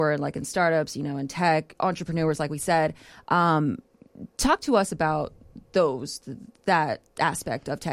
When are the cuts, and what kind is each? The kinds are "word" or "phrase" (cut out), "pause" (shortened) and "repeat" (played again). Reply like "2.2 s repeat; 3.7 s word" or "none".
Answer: none